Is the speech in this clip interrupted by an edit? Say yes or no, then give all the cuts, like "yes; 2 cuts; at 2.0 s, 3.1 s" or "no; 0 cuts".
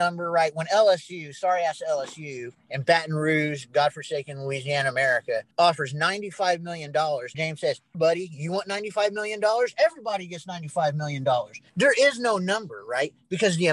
yes; 4 cuts; at 5.5 s, 7.3 s, 7.9 s, 11.7 s